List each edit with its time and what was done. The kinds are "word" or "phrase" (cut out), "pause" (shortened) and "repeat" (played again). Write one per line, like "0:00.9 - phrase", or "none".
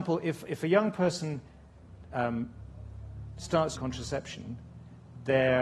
0:03.7 - word